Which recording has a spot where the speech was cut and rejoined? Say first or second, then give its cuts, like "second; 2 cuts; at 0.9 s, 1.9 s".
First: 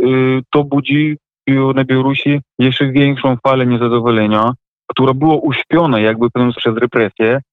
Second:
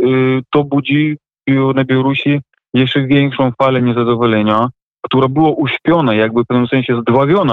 first; 2 cuts; at 2.5 s, 6.5 s